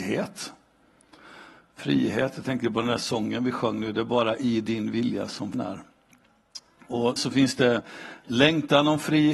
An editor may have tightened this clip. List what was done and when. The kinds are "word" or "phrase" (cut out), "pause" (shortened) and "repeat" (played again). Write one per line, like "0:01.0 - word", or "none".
0:05.5 - word
0:07.2 - word

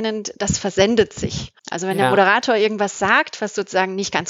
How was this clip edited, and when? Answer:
0:01.6 - pause

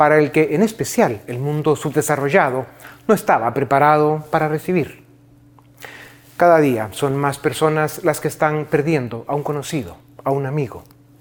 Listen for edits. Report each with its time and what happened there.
none

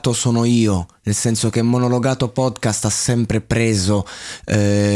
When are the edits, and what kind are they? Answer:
none

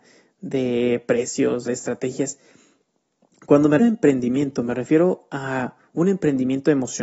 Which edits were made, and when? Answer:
0:01.7 - word
0:03.8 - word

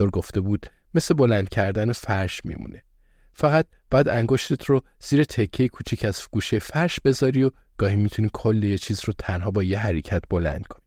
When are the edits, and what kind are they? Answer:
none

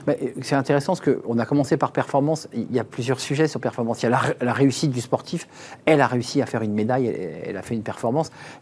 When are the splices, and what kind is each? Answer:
none

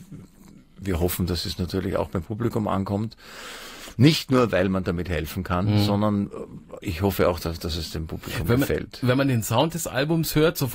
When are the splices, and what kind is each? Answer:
none

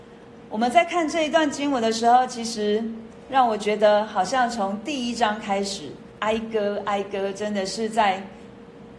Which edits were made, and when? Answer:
none

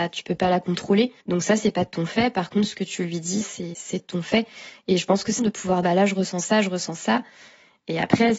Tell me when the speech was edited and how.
0:01.2 - pause
0:03.4 - word
0:05.4 - word
0:05.8 - word

